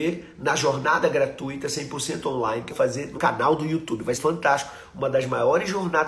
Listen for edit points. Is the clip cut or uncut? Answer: cut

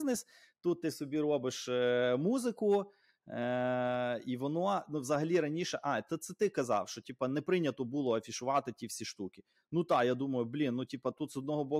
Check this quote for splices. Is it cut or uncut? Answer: uncut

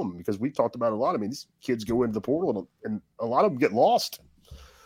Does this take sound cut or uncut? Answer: uncut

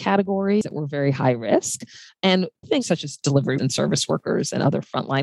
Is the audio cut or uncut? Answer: cut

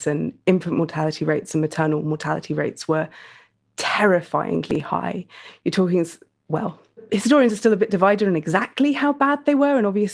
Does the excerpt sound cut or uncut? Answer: uncut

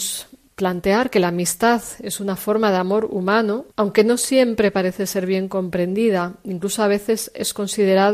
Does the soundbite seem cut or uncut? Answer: cut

